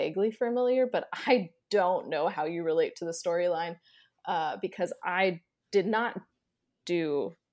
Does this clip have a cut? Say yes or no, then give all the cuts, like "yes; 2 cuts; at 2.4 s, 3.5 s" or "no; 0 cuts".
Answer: no; 0 cuts